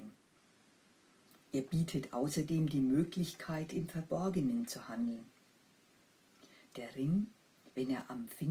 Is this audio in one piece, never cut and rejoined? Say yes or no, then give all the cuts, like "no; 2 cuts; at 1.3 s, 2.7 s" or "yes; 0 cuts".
yes; 0 cuts